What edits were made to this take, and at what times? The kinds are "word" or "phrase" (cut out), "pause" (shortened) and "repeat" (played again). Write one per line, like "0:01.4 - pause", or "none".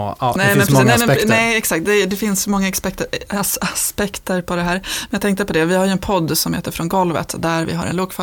none